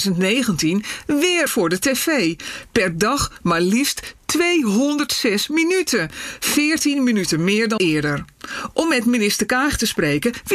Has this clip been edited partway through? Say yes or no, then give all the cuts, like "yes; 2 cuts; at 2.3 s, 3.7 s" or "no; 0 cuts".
yes; 2 cuts; at 1.5 s, 7.8 s